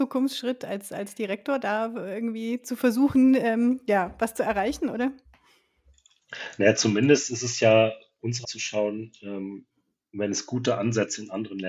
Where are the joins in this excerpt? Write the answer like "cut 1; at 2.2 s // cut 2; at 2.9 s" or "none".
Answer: cut 1; at 8.4 s